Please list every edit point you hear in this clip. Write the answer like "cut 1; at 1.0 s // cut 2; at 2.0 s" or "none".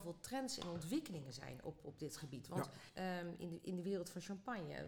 cut 1; at 2.9 s

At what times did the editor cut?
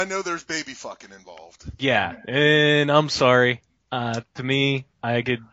none

